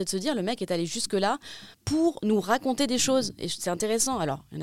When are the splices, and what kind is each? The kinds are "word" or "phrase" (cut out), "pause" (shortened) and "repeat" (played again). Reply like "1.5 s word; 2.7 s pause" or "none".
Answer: 1.7 s pause

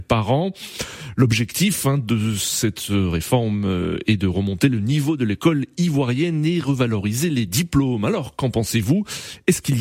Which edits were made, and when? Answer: none

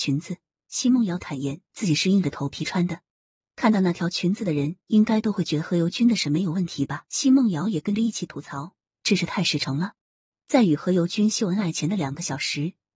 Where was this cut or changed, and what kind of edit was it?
7.1 s pause

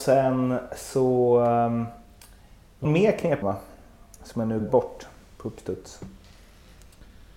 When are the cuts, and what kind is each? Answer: 2.8 s word; 3.4 s word; 4.6 s word

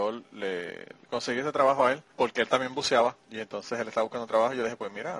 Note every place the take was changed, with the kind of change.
2.1 s pause; 3.2 s pause

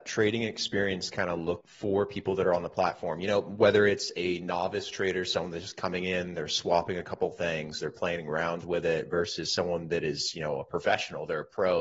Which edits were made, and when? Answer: 1.6 s word

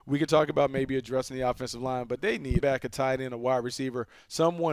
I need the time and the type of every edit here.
2.6 s phrase

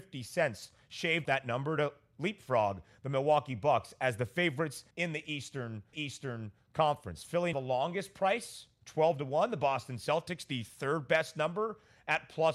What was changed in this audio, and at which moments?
1.3 s word; 4.9 s pause; 5.9 s repeat; 7.5 s word

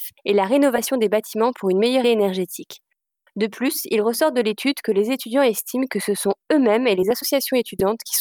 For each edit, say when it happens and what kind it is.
2.0 s word

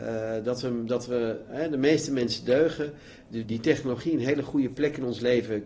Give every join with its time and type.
3.4 s word

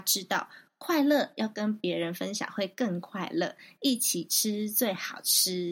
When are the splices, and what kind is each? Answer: none

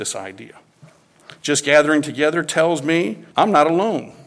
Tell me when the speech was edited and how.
3.3 s pause

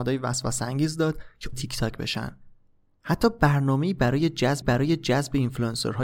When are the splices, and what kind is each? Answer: 1.5 s word; 4.6 s repeat

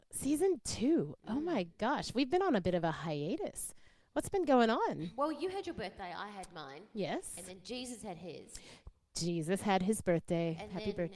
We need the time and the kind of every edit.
none

